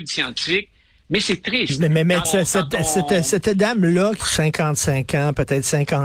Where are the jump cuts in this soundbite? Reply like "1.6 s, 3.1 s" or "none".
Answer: 2.2 s, 4.2 s